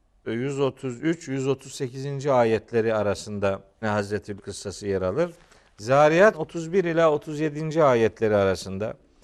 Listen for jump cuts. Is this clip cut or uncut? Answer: cut